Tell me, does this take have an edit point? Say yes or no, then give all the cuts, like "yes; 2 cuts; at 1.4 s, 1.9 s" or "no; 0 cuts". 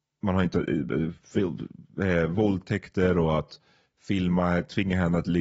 no; 0 cuts